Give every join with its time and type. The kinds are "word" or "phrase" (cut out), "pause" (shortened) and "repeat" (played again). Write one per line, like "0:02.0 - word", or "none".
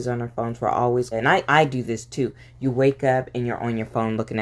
0:01.1 - phrase
0:01.5 - word

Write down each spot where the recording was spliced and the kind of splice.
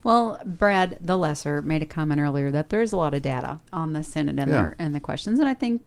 0:03.7 - pause

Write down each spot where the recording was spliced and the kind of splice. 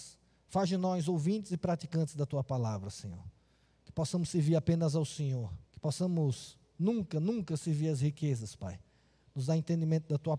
0:05.7 - pause

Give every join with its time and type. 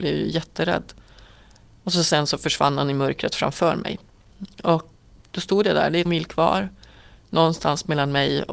0:05.2 - word
0:06.1 - word

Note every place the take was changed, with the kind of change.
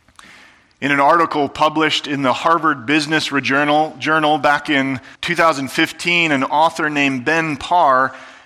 0:05.1 - pause

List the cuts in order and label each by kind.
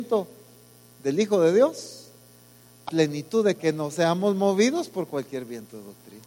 0:02.9 - word
0:03.6 - phrase

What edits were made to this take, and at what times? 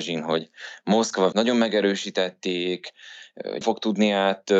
0:01.3 - word
0:03.6 - word

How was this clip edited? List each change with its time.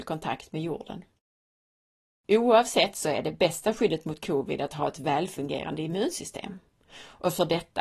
none

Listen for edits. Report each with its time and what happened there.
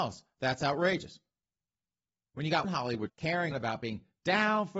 0:02.6 - word
0:03.1 - word
0:03.5 - word

